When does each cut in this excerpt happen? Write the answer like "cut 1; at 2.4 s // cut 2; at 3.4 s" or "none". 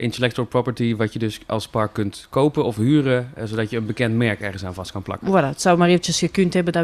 none